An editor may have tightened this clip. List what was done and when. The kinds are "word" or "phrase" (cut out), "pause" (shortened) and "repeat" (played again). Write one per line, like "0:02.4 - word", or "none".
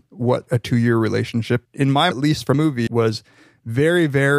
0:01.7 - word
0:02.1 - word
0:02.5 - word
0:02.9 - word